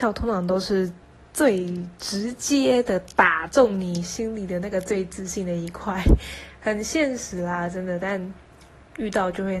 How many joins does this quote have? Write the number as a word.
zero